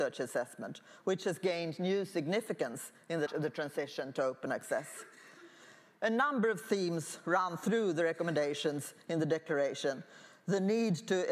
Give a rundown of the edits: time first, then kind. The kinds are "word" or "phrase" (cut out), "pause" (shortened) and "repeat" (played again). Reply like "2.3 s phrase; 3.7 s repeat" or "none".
3.3 s word